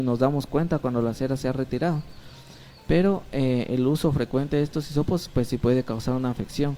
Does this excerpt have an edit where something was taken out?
no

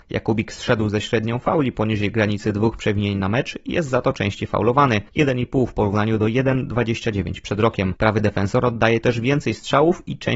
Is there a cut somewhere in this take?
no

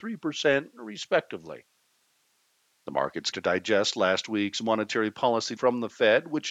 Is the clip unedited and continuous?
no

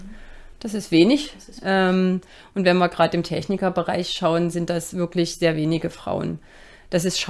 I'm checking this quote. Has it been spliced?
no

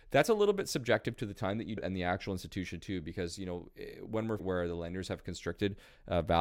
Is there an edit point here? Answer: yes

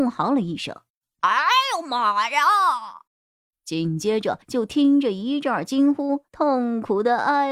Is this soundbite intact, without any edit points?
no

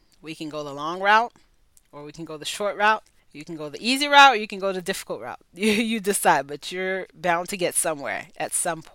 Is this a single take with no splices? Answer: no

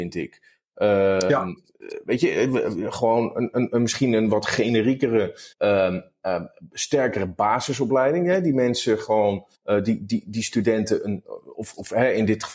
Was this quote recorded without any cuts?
no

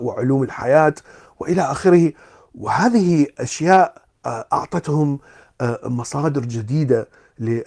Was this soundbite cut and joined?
no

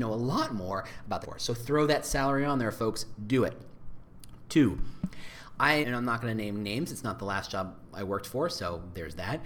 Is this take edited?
yes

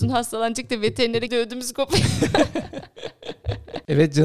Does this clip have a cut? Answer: yes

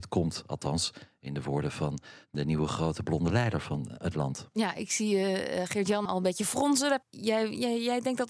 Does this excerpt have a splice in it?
yes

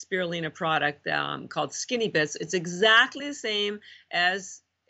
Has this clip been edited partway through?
no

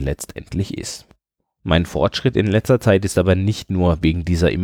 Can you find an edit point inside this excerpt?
no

